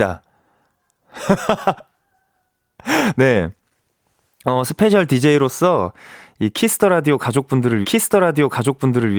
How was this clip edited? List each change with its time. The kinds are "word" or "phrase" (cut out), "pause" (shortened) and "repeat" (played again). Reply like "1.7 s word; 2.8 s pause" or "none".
7.8 s repeat